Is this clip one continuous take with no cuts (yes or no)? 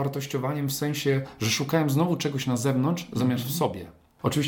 yes